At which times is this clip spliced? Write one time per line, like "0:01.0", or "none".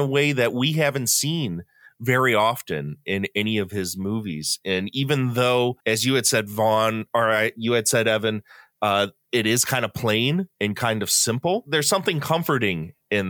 0:05.8
0:10.5